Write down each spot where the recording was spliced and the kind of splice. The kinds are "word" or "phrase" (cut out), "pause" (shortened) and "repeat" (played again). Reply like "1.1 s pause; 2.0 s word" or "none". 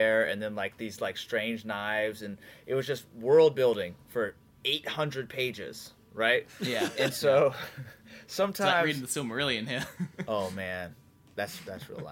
none

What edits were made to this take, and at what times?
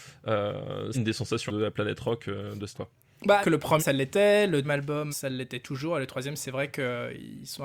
0.9 s word; 1.5 s word; 2.7 s word; 3.4 s word; 3.8 s word; 4.6 s word; 5.1 s word

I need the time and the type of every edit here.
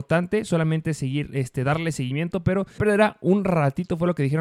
2.8 s word

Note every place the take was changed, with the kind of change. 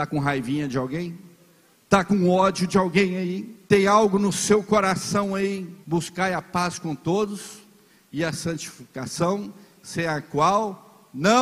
1.7 s pause; 3.6 s pause; 5.8 s pause

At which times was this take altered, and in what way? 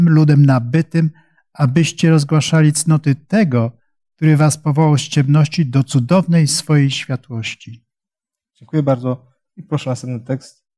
none

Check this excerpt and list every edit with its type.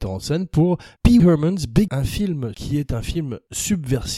1.2 s word; 1.9 s word; 2.5 s word

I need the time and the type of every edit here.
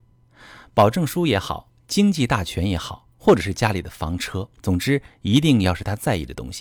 4.6 s pause

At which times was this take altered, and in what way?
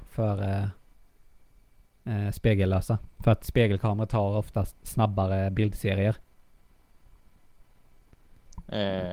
none

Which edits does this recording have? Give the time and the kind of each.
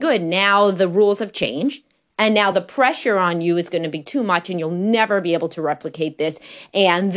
none

